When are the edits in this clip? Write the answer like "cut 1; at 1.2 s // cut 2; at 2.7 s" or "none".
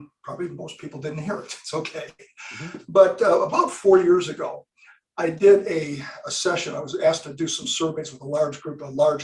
none

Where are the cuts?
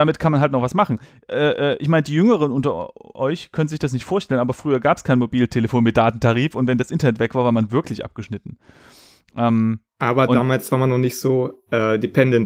none

